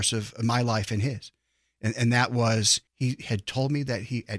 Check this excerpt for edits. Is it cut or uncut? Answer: cut